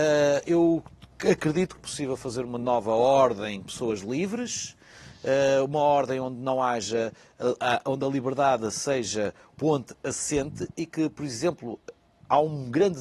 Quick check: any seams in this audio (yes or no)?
yes